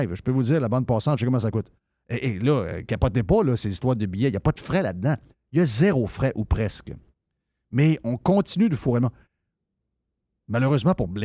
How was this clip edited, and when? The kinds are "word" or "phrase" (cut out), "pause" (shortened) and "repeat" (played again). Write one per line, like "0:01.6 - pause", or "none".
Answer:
none

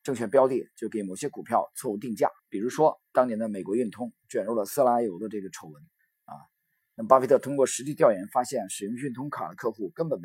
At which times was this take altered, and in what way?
0:02.4 - pause
0:06.0 - pause

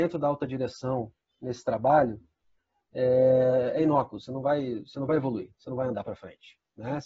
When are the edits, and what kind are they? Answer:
none

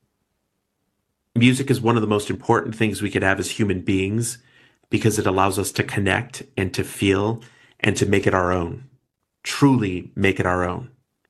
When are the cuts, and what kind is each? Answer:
none

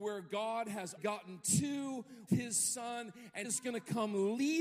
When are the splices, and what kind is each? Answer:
0:01.0 - word
0:02.3 - word
0:03.4 - word

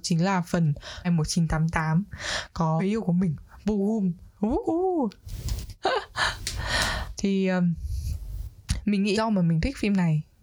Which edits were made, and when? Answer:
0:01.0 - word
0:02.8 - word
0:03.6 - word
0:07.2 - word
0:09.1 - word

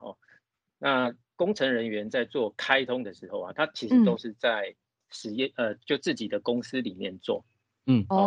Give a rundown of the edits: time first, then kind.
none

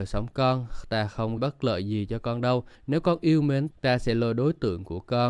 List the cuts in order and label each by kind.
0:01.4 - word
0:02.8 - pause
0:03.7 - word

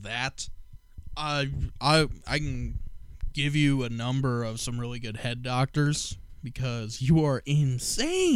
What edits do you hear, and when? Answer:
none

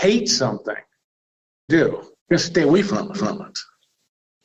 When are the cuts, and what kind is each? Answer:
0:01.7 - phrase
0:02.2 - pause
0:03.1 - repeat

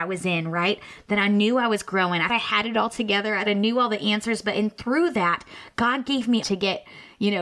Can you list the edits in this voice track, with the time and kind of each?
0:02.3 - word
0:03.5 - word
0:06.4 - word

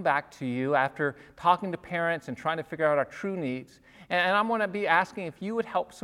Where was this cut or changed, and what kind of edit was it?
none

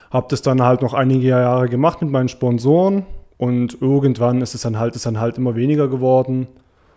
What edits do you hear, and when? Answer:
0:03.3 - pause
0:04.9 - repeat

